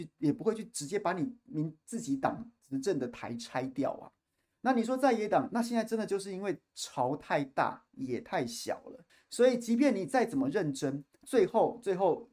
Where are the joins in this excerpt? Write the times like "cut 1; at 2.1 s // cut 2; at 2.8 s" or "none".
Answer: cut 1; at 9.1 s